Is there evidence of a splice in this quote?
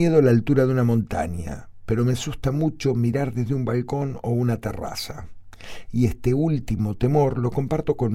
no; 0 cuts

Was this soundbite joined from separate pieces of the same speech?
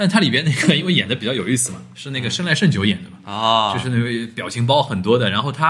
no; 0 cuts

